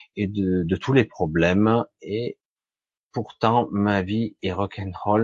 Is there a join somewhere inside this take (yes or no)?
no